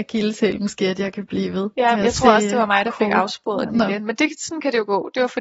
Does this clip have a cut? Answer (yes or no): no